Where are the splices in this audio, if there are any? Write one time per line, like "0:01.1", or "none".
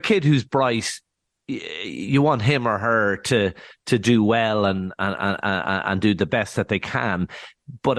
none